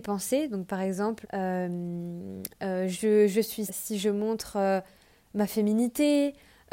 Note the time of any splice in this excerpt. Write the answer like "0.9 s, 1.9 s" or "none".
1.2 s, 3.7 s